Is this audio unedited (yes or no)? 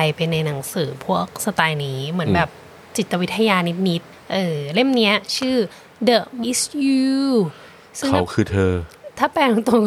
no